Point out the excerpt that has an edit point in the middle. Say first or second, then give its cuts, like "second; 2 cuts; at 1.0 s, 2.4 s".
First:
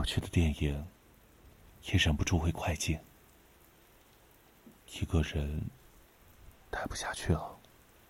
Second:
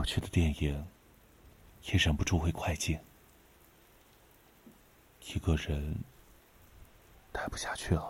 first; 2 cuts; at 4.8 s, 6.6 s